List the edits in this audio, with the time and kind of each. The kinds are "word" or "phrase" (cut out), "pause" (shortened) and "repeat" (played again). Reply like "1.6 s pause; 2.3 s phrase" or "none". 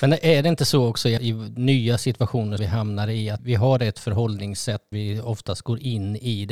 1.2 s word; 2.6 s word; 3.4 s word; 4.9 s word